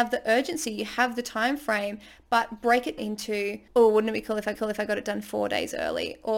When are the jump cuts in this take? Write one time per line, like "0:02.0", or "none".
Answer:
0:03.0
0:03.7
0:04.5

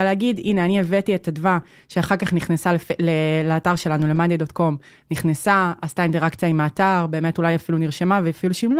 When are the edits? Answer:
none

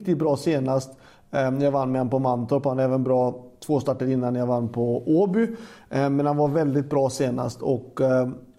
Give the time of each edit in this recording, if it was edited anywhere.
none

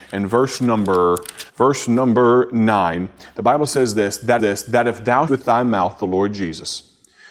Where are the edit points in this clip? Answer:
0:01.5
0:04.4
0:05.3

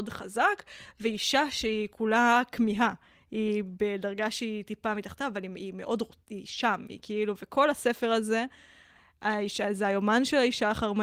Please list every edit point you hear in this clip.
none

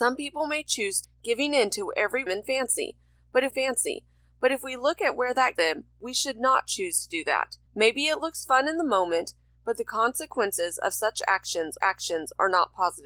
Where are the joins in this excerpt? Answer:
0:01.0
0:02.3
0:03.5
0:05.6
0:07.7
0:11.8

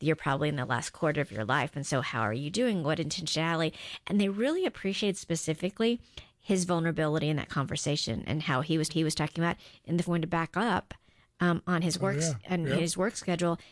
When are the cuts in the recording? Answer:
0:08.9
0:10.0

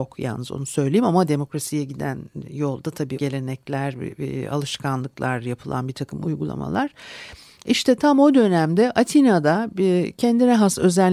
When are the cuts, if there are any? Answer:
0:03.2

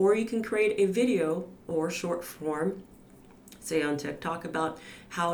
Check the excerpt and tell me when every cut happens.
none

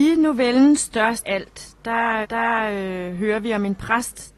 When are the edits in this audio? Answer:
0:01.2
0:02.2

